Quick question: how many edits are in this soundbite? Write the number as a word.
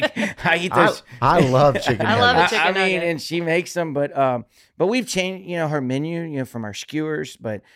zero